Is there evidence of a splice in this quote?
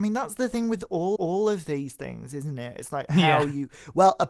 yes; 1 cut; at 1.2 s

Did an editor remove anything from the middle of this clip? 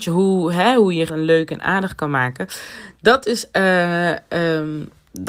yes; 1 cut; at 1.1 s

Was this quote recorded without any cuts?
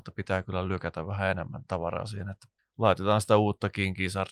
no; 1 cut; at 2.6 s

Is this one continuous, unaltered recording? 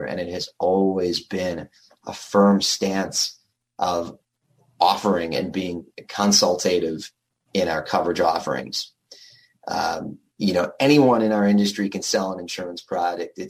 yes; 0 cuts

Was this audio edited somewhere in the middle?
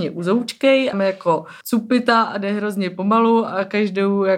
yes; 2 cuts; at 0.9 s, 1.6 s

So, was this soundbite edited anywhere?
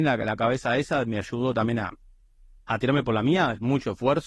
no; 0 cuts

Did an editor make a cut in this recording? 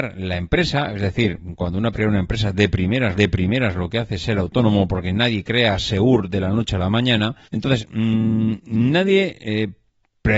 yes; 3 cuts; at 1.9 s, 3.1 s, 7.4 s

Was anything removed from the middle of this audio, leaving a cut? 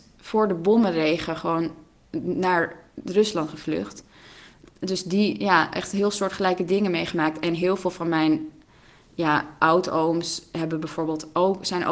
no; 0 cuts

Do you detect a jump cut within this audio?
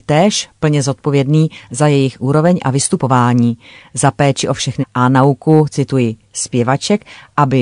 yes; 2 cuts; at 2.2 s, 4.8 s

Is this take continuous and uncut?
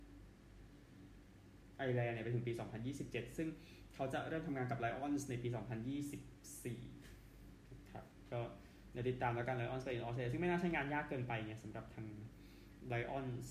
yes; 0 cuts

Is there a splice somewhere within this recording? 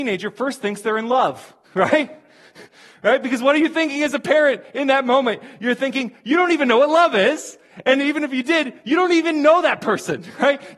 yes; 1 cut; at 1.6 s

